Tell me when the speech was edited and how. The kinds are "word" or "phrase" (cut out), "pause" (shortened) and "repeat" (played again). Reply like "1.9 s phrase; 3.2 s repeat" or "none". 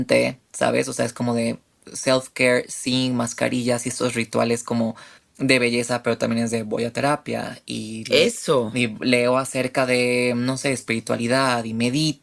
5.2 s pause